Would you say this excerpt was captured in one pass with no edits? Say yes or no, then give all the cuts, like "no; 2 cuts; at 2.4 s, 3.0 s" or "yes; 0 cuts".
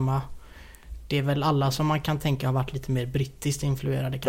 yes; 0 cuts